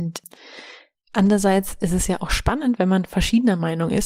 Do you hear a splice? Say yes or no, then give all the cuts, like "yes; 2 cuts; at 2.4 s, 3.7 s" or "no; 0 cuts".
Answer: yes; 1 cut; at 0.9 s